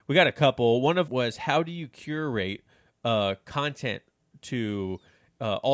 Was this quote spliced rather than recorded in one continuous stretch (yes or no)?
yes